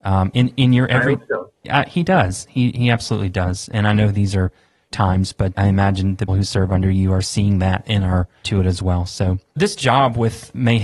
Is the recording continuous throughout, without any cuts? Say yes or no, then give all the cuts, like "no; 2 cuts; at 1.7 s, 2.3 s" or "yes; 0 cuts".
no; 5 cuts; at 4.9 s, 5.5 s, 6.3 s, 8.4 s, 9.6 s